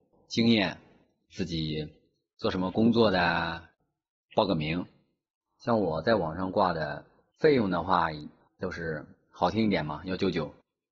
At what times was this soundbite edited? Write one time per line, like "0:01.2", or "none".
none